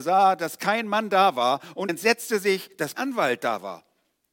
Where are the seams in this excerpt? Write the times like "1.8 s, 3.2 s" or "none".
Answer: 1.9 s, 2.9 s

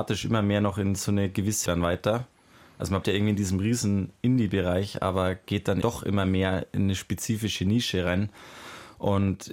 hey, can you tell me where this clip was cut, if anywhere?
1.7 s, 3.0 s, 5.8 s

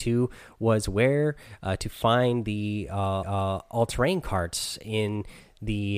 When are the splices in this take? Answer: 3.2 s

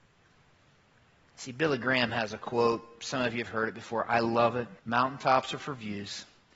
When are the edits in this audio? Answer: 4.8 s

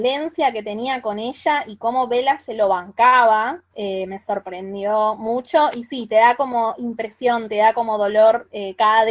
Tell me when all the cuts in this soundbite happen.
none

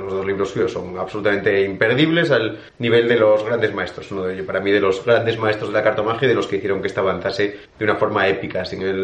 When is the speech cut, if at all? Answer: 2.7 s, 7.7 s

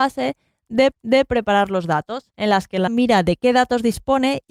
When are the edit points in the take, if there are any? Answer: 0.9 s, 2.3 s, 2.9 s

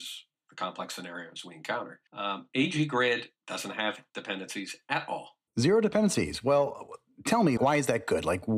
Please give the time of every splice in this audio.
2.1 s, 3.4 s, 4.1 s, 5.5 s, 7.6 s

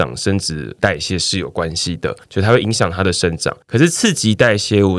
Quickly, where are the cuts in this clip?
2.2 s, 3.6 s

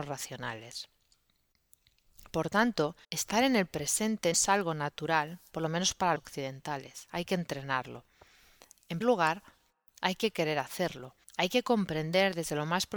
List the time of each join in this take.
3.0 s, 4.3 s, 6.2 s, 9.0 s, 11.2 s

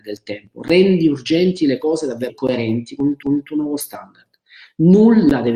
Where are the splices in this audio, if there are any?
2.3 s, 3.2 s

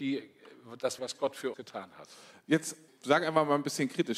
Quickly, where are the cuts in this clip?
1.0 s, 1.5 s, 2.9 s

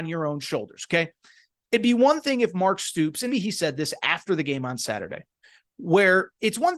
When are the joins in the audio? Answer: 3.3 s

